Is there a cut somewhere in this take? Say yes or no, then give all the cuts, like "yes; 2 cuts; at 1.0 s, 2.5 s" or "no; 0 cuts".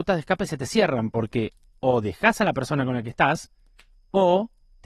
no; 0 cuts